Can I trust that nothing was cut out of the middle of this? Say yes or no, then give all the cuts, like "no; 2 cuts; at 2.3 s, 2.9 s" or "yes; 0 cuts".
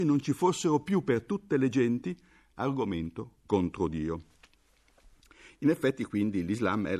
yes; 0 cuts